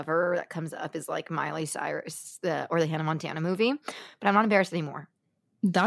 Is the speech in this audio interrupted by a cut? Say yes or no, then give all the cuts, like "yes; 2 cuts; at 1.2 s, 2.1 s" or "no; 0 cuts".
no; 0 cuts